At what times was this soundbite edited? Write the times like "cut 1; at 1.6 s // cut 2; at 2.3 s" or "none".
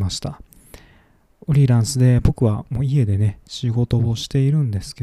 none